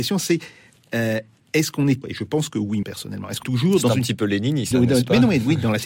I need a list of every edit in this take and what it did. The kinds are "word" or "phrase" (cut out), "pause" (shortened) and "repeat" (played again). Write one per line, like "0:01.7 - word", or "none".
0:02.0 - word
0:02.8 - word
0:03.4 - word
0:04.7 - word